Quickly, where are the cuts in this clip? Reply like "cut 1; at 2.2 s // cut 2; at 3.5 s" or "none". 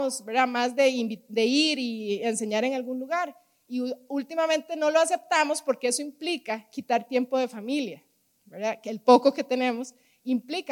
none